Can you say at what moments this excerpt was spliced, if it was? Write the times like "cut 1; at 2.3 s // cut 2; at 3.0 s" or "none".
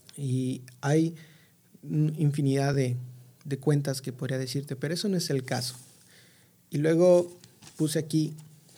none